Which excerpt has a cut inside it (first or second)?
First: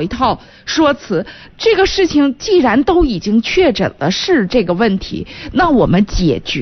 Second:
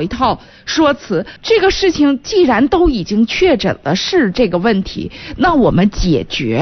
second